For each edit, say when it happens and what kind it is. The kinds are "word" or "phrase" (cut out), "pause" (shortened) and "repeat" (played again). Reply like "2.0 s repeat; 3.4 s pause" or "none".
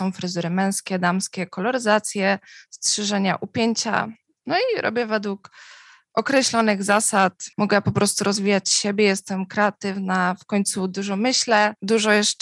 none